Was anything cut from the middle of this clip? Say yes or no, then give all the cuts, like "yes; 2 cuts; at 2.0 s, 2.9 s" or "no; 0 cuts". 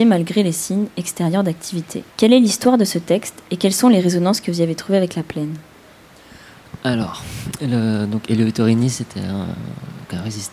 yes; 1 cut; at 2.1 s